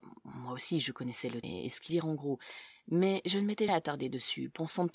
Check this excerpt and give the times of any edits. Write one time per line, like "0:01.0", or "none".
0:01.4
0:01.9
0:03.7